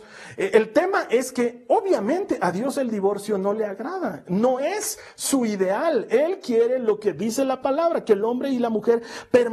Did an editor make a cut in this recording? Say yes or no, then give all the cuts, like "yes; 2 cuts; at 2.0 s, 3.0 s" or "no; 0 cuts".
no; 0 cuts